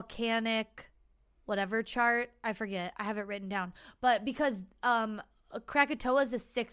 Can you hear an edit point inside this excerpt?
no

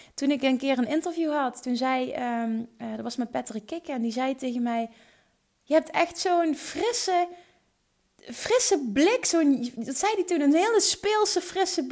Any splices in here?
no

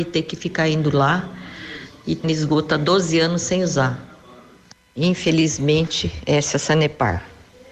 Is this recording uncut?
no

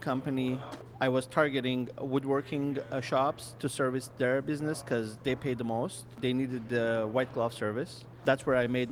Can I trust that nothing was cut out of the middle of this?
yes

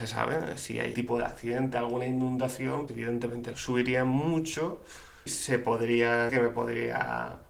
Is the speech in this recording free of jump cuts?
no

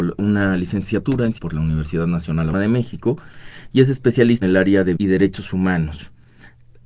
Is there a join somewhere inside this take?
yes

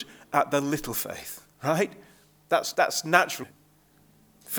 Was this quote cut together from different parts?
yes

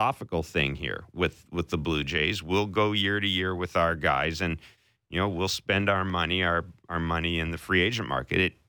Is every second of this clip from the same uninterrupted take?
yes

